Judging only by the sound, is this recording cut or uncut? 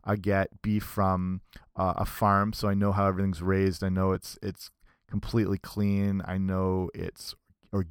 uncut